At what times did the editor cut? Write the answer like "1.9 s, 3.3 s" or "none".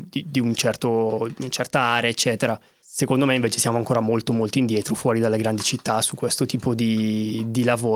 none